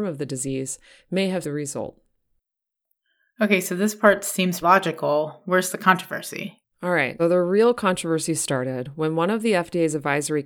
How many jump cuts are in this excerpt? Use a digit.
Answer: 4